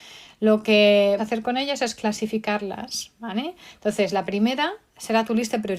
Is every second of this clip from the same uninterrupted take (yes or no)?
no